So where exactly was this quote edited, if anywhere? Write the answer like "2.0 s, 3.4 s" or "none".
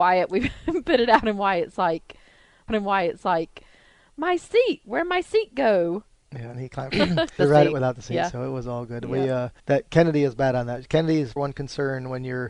2.7 s, 6.5 s, 6.9 s, 7.4 s, 9.6 s, 11.4 s